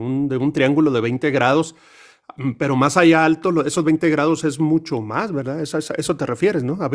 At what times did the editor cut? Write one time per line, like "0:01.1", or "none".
none